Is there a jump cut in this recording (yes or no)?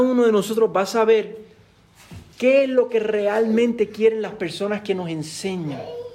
no